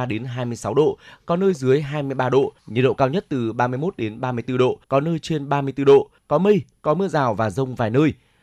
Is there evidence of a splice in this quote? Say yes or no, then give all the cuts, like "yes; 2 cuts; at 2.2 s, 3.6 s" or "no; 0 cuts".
yes; 3 cuts; at 2.6 s, 4.8 s, 6.2 s